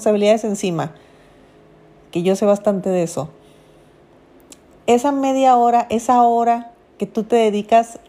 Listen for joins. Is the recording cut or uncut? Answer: uncut